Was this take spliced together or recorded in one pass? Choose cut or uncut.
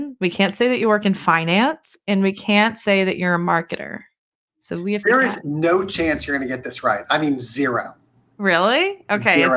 uncut